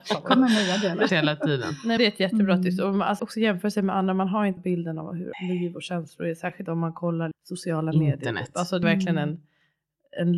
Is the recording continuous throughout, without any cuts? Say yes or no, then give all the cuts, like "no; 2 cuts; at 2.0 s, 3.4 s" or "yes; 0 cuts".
no; 8 cuts; at 1.1 s, 2.0 s, 3.2 s, 4.6 s, 5.3 s, 6.7 s, 7.3 s, 8.8 s